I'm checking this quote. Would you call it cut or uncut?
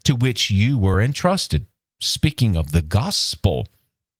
uncut